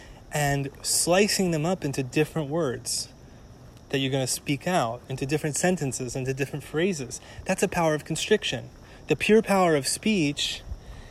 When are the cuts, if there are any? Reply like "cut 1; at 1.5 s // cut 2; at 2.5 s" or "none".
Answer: cut 1; at 3.8 s